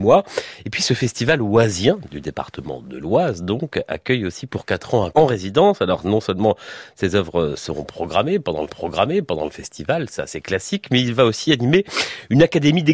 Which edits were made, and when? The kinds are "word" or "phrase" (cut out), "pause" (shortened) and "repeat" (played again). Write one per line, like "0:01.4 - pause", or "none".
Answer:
0:05.1 - word
0:08.7 - repeat